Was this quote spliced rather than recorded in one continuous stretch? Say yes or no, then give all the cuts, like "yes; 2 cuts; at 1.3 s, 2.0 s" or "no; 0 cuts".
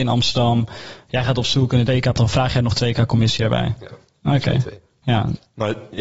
yes; 2 cuts; at 1.9 s, 2.2 s